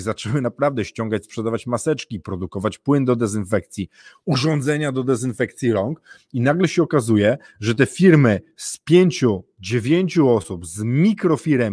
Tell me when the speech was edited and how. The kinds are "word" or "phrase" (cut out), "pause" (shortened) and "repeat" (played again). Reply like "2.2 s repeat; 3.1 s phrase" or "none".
none